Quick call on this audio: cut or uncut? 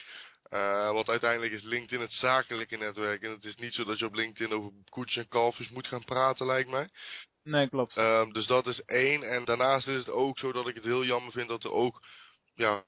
cut